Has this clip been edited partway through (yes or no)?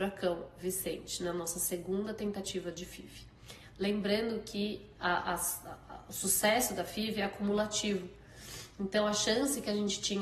no